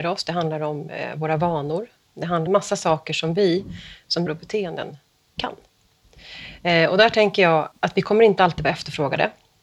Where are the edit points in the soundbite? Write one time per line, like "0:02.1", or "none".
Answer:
0:02.5
0:04.3
0:07.7